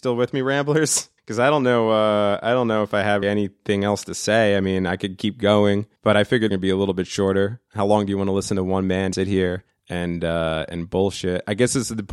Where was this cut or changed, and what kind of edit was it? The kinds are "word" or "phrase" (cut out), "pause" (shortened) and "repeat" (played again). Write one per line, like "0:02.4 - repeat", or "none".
0:01.2 - pause
0:03.2 - word
0:06.0 - pause
0:06.5 - phrase
0:09.1 - word
0:09.7 - pause